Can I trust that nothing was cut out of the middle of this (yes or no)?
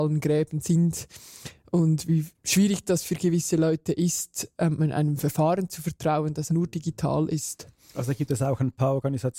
no